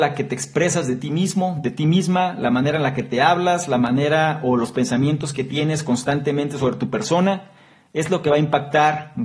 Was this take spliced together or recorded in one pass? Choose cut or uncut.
uncut